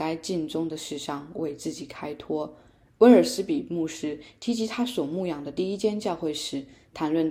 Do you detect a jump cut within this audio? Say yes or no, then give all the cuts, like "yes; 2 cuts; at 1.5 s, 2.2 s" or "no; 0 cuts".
no; 0 cuts